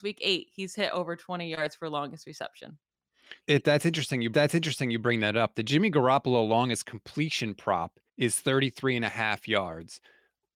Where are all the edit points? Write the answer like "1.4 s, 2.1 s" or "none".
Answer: 3.4 s, 4.3 s, 8.1 s